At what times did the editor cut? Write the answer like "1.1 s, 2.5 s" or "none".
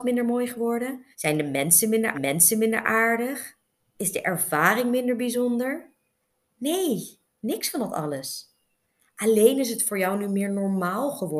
1.1 s, 2.1 s